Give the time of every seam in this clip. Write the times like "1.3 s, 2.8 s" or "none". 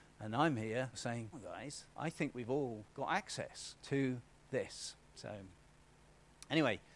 0.9 s, 1.3 s, 3.8 s, 5.0 s